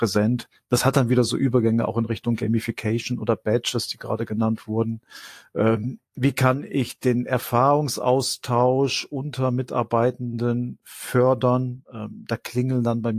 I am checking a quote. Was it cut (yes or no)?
no